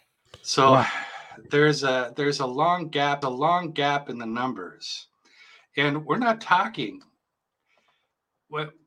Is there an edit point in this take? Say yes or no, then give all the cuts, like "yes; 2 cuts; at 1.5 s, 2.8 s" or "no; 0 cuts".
yes; 1 cut; at 3.2 s